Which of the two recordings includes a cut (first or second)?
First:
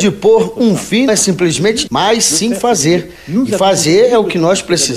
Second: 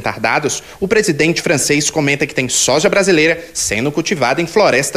first